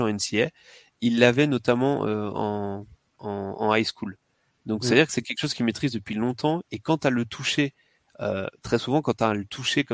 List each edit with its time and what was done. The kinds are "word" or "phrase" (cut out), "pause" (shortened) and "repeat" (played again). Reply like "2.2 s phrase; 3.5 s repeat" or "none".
2.9 s pause